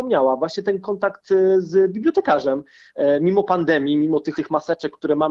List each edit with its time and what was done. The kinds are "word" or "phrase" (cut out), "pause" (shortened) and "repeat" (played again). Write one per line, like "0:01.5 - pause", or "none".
0:04.3 - phrase